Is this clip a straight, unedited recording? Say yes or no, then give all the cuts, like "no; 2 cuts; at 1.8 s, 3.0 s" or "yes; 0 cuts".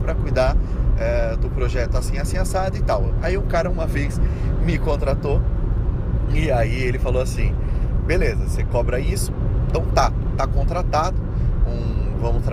yes; 0 cuts